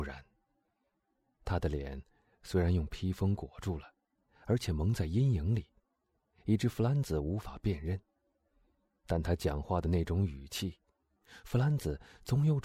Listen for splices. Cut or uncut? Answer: uncut